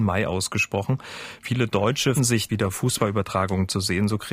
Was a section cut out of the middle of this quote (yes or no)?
yes